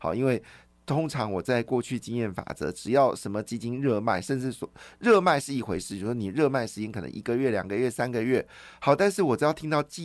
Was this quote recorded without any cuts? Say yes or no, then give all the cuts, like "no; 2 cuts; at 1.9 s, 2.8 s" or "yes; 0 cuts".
yes; 0 cuts